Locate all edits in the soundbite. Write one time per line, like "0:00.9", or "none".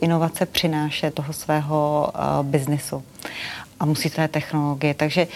0:01.1
0:04.1